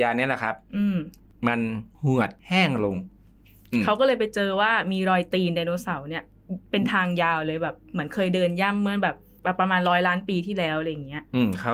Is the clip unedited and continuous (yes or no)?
yes